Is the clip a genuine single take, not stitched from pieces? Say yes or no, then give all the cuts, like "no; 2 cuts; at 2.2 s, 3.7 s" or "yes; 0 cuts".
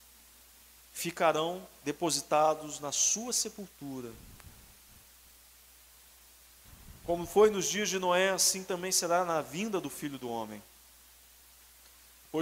yes; 0 cuts